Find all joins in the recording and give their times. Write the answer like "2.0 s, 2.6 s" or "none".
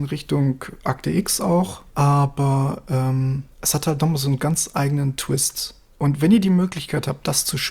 1.9 s, 3.5 s, 5.9 s